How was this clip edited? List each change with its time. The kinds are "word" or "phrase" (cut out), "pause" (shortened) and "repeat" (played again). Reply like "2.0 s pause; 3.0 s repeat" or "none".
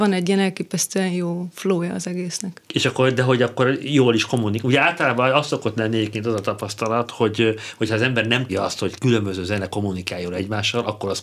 2.7 s pause; 8.5 s word; 8.9 s word